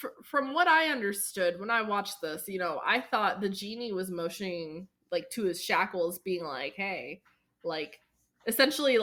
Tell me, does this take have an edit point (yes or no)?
no